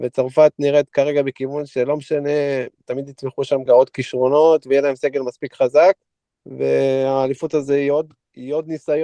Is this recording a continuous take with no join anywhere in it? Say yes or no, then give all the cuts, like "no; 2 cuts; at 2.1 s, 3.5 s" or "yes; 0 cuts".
no; 3 cuts; at 2.8 s, 3.7 s, 6.1 s